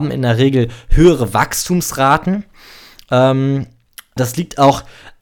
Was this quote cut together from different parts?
yes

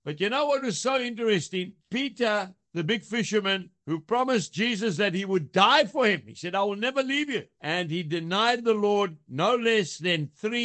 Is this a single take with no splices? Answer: no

